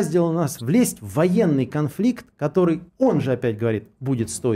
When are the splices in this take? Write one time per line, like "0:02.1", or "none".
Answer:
0:02.9

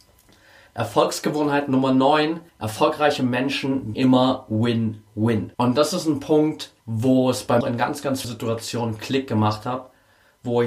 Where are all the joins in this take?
0:02.5
0:03.9
0:05.5
0:06.8
0:07.6
0:08.2

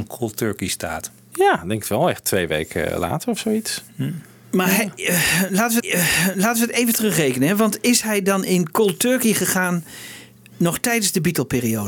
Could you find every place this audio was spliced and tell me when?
0:05.8

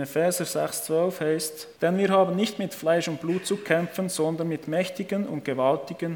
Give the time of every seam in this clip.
0:01.8

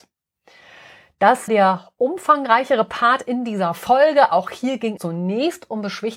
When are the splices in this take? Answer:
0:01.5
0:05.0

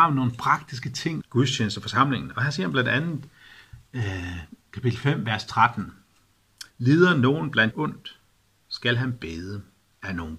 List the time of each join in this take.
0:01.2
0:06.7
0:07.7

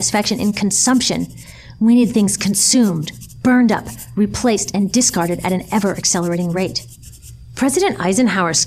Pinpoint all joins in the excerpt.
none

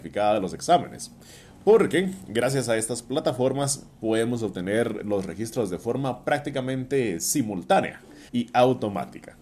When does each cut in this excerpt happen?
0:08.3

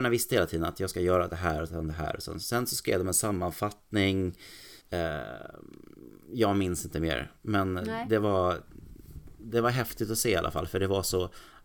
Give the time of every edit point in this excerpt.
0:04.8

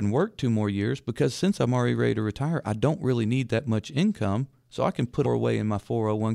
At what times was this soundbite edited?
0:05.2

